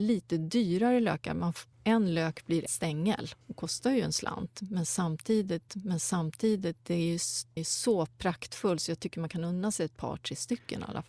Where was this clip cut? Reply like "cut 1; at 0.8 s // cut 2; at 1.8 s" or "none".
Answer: cut 1; at 1.7 s // cut 2; at 2.7 s // cut 3; at 3.4 s // cut 4; at 5.7 s // cut 5; at 7.6 s